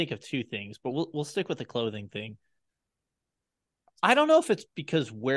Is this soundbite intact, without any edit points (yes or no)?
yes